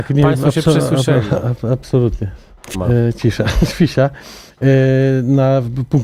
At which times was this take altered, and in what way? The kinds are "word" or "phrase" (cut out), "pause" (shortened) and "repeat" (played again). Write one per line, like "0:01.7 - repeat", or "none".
0:02.7 - word